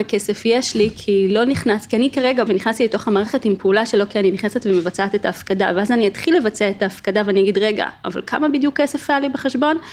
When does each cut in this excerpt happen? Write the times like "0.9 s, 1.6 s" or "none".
2.5 s